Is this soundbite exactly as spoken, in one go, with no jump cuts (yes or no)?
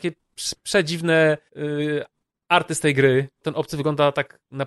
no